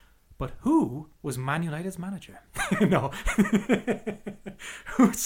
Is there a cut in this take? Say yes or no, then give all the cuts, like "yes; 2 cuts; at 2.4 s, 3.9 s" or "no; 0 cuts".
no; 0 cuts